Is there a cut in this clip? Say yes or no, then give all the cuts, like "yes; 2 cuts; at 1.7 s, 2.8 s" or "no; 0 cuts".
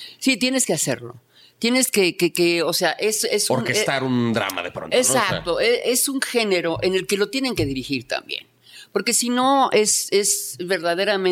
no; 0 cuts